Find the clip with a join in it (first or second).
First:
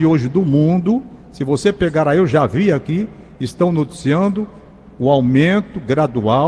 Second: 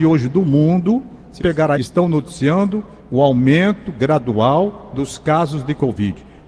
second